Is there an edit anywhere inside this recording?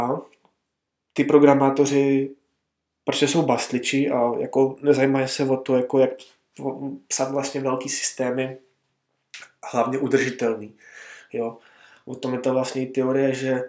no; 0 cuts

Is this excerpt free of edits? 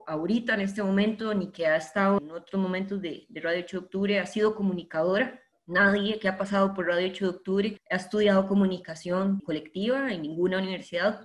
yes; 0 cuts

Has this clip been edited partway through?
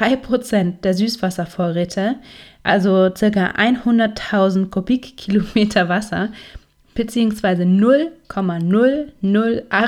no; 0 cuts

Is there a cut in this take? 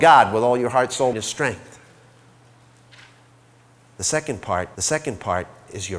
yes; 2 cuts; at 1.1 s, 4.7 s

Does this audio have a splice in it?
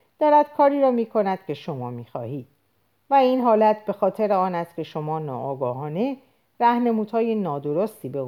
no; 0 cuts

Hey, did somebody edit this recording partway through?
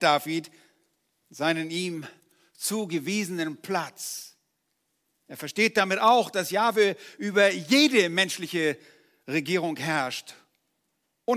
no; 0 cuts

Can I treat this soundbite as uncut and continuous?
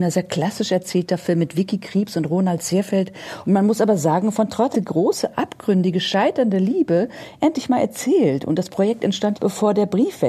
no; 2 cuts; at 4.7 s, 9.4 s

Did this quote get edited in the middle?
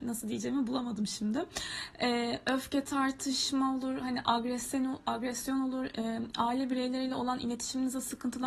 no; 0 cuts

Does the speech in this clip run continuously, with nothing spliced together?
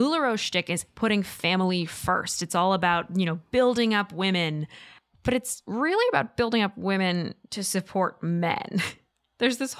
yes; 0 cuts

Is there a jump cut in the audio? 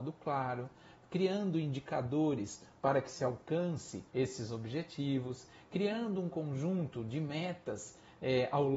yes; 1 cut; at 4.1 s

